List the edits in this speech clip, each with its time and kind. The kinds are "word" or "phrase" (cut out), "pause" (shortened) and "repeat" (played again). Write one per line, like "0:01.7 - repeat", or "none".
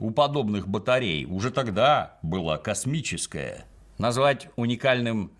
none